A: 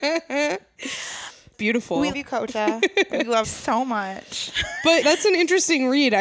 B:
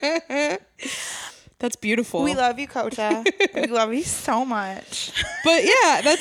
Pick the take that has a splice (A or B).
A